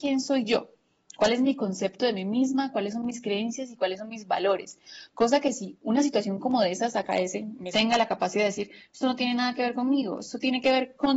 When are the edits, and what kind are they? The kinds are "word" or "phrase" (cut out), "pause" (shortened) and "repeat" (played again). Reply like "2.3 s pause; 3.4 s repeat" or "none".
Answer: 7.7 s phrase